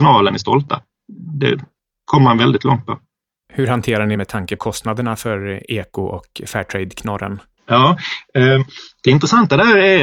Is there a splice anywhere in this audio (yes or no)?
yes